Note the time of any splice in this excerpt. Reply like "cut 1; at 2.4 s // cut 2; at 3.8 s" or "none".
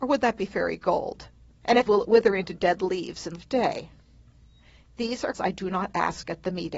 cut 1; at 1.9 s // cut 2; at 3.4 s // cut 3; at 5.3 s